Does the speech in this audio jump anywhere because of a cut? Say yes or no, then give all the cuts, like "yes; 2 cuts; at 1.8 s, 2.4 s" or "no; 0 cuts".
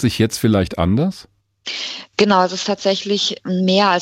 no; 0 cuts